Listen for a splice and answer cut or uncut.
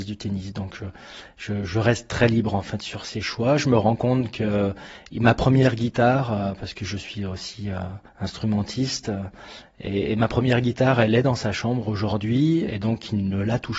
cut